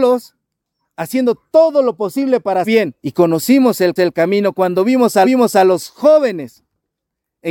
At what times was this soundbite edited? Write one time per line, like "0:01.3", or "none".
0:02.6
0:03.0
0:04.0
0:05.2